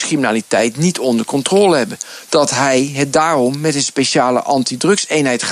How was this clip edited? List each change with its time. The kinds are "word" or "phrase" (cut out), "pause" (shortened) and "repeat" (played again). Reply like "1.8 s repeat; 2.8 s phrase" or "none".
none